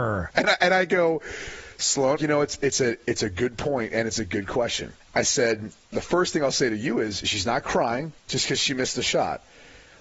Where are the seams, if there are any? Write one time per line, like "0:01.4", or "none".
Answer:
0:02.2
0:05.0
0:05.9
0:08.2